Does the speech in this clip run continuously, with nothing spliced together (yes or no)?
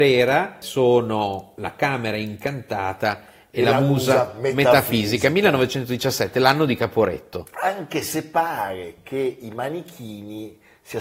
yes